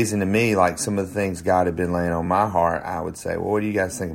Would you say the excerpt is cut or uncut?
uncut